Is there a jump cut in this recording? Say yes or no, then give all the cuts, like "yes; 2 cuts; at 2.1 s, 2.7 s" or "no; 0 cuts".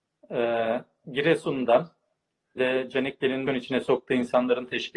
yes; 2 cuts; at 2.6 s, 3.5 s